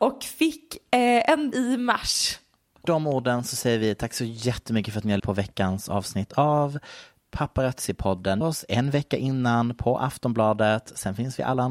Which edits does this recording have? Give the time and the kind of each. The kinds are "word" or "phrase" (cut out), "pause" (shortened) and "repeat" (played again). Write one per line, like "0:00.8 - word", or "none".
0:01.5 - word
0:02.8 - word
0:05.2 - word
0:08.4 - word